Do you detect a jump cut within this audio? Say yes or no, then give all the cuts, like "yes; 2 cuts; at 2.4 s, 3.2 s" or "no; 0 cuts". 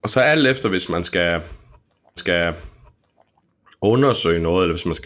yes; 1 cut; at 2.2 s